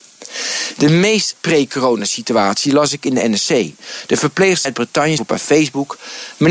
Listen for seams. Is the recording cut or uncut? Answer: cut